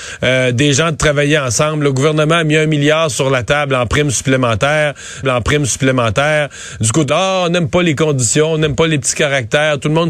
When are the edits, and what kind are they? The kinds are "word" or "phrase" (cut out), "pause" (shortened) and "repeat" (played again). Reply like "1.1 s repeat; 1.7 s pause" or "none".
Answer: 5.2 s repeat; 7.1 s word

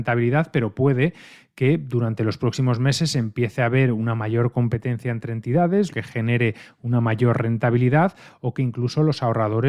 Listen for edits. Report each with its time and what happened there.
5.9 s word

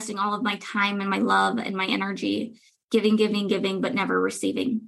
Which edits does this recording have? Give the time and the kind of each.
none

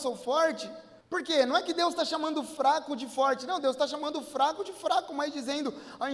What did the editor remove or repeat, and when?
1.0 s pause

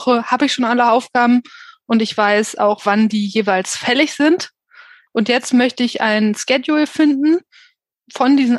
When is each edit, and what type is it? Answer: none

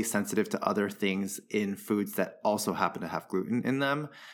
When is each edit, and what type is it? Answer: none

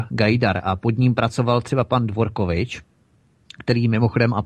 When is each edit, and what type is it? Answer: none

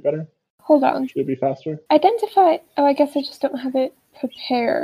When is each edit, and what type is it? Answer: 1.9 s pause

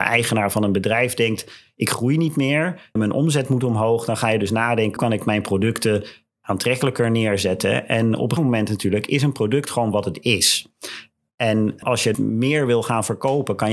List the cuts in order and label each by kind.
3.0 s word; 5.0 s word; 8.4 s word; 11.8 s word; 12.1 s word

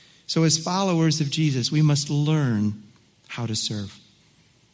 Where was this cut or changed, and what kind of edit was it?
none

